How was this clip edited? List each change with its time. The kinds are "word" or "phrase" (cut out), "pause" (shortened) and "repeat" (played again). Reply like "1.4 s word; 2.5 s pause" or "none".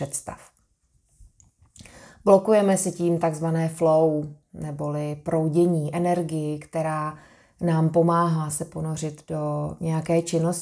none